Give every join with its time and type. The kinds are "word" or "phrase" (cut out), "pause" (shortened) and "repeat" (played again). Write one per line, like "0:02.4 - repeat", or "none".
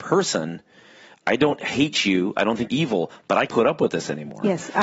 0:02.7 - word
0:03.5 - word

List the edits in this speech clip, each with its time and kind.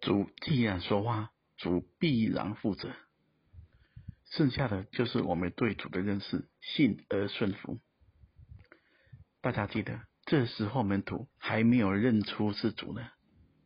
0:04.2 - pause
0:06.5 - pause
0:10.2 - pause
0:11.3 - pause

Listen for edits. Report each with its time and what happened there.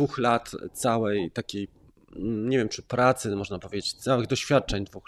none

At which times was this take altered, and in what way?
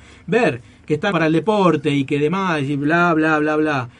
0:01.1 - word

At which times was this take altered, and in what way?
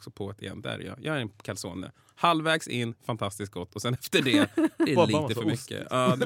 none

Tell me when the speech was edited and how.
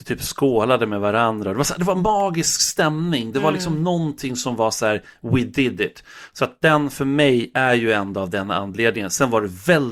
none

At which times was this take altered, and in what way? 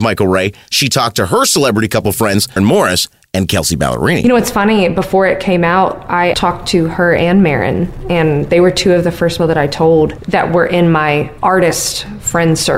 0:02.6 - word
0:06.3 - word
0:09.4 - word

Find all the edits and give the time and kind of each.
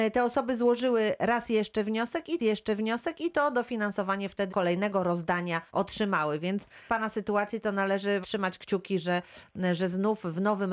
0:02.4 - repeat
0:04.5 - phrase
0:05.7 - pause
0:06.9 - phrase
0:08.2 - phrase

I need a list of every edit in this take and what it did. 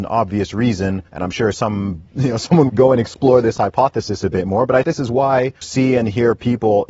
0:01.1 - pause
0:02.1 - pause
0:02.7 - phrase
0:04.8 - word
0:05.6 - word

